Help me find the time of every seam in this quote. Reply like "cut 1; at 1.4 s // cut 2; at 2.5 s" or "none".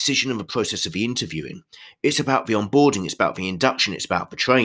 none